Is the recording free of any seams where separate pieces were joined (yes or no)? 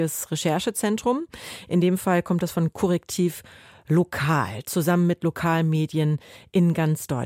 yes